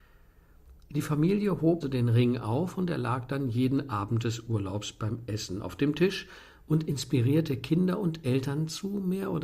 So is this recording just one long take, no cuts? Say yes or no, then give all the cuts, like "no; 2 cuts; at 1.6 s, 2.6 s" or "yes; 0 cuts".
no; 1 cut; at 1.8 s